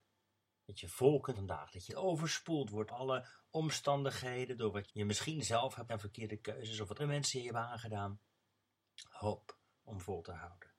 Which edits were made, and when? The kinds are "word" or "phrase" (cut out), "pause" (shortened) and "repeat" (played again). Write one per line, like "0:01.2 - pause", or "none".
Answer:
0:01.3 - word
0:01.9 - word
0:02.9 - word
0:04.9 - word
0:05.9 - word
0:07.0 - word